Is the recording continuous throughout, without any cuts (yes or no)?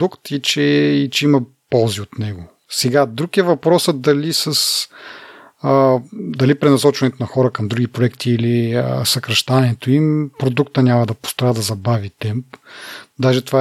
yes